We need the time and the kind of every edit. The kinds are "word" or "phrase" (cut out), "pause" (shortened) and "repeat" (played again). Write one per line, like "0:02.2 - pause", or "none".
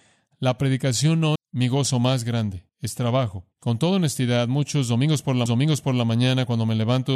0:01.4 - word
0:02.7 - pause
0:03.5 - pause
0:05.5 - repeat